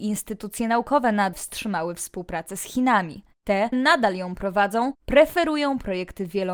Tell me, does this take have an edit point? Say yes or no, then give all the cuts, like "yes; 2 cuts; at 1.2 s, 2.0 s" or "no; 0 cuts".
yes; 2 cuts; at 1.3 s, 3.7 s